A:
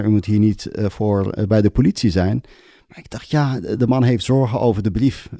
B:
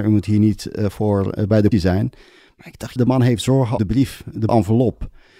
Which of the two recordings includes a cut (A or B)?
B